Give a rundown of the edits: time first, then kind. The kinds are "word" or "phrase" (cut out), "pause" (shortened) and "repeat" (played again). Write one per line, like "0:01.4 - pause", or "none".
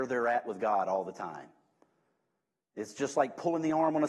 none